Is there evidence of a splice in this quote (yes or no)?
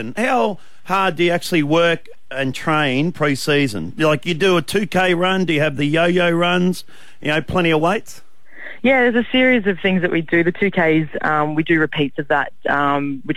no